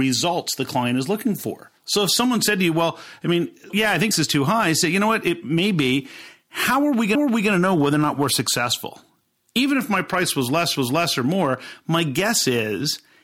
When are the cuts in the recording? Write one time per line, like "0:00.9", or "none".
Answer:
0:01.8
0:03.7
0:04.1
0:07.1
0:10.7